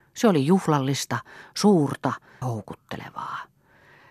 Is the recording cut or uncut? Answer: cut